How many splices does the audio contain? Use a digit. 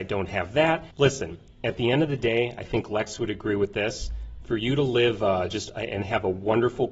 1